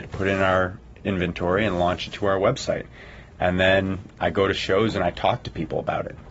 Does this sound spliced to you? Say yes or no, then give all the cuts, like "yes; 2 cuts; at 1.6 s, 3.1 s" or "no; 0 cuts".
no; 0 cuts